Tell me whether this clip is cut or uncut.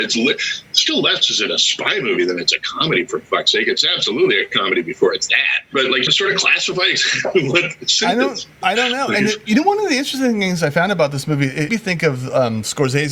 cut